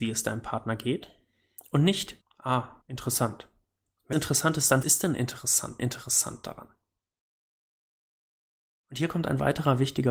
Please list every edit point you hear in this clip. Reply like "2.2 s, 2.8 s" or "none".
2.2 s, 2.8 s, 4.1 s, 4.8 s, 5.8 s